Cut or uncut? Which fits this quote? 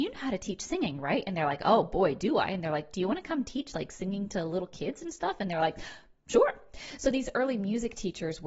uncut